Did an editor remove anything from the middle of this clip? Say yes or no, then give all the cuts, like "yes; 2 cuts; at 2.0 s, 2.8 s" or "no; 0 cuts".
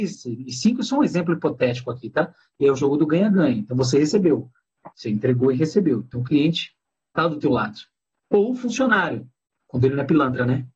yes; 2 cuts; at 4.9 s, 6.8 s